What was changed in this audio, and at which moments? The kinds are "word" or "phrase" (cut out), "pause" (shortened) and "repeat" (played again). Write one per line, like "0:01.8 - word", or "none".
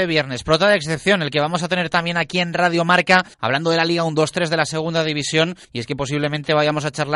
0:03.3 - pause
0:05.6 - pause